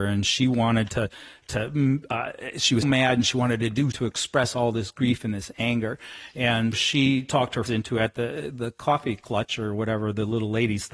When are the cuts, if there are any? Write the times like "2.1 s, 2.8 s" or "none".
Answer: 2.8 s, 3.9 s, 6.7 s, 7.7 s